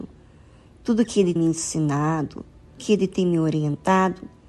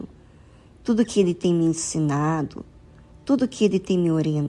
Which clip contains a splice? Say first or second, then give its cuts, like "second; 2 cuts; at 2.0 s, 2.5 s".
first; 2 cuts; at 1.4 s, 2.8 s